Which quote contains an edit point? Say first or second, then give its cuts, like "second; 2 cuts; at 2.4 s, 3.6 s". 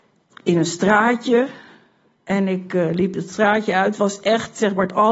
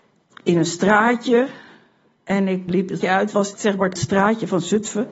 second; 4 cuts; at 2.7 s, 3.0 s, 3.6 s, 4.0 s